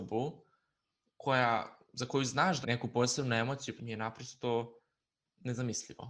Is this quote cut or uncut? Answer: cut